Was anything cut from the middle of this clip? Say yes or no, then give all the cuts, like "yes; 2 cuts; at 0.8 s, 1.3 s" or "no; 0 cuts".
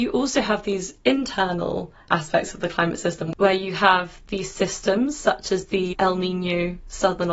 yes; 1 cut; at 5.9 s